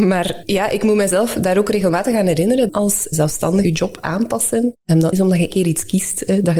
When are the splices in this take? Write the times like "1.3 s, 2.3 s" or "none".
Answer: 2.7 s, 3.6 s, 5.1 s, 5.5 s